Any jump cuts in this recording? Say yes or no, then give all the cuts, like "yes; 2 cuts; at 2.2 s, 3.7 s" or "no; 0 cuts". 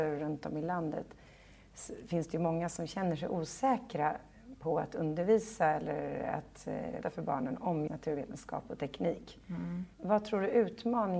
yes; 3 cuts; at 7.0 s, 7.9 s, 9.9 s